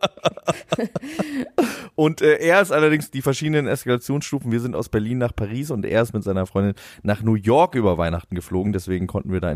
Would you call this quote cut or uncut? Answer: uncut